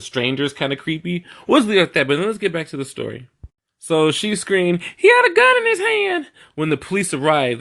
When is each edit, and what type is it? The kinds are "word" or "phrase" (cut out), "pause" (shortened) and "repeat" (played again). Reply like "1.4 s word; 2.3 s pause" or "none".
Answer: none